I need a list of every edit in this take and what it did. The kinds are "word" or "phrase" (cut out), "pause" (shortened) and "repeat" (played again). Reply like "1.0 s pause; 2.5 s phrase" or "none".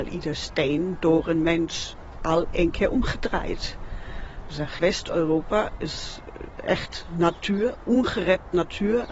4.8 s word